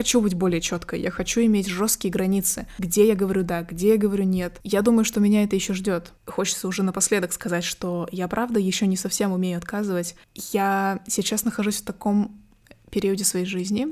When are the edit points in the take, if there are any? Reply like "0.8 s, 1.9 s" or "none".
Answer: none